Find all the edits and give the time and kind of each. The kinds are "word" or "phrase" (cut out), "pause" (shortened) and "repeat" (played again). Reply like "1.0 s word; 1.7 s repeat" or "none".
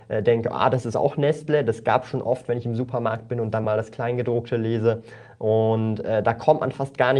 none